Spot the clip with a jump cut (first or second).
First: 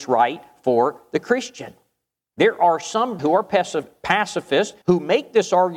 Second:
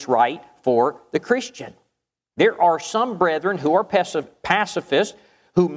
first